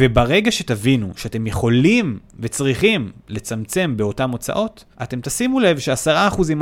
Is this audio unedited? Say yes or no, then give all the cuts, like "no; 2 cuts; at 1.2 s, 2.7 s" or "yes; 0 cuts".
no; 1 cut; at 4.9 s